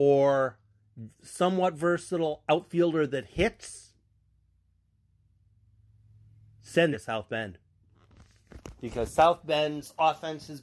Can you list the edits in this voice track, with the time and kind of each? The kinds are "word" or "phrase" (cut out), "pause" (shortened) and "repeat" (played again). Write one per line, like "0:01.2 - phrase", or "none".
0:01.1 - pause
0:06.9 - phrase